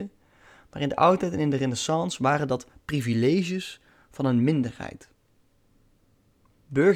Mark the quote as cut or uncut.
uncut